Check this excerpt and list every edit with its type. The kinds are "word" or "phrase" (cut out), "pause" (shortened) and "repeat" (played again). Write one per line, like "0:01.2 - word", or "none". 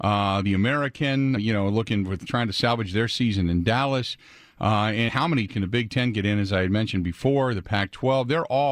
0:01.4 - word
0:02.3 - word
0:05.1 - word
0:05.5 - word